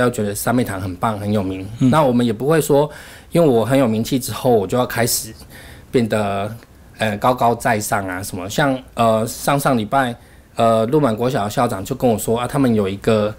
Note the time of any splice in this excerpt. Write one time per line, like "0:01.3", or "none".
none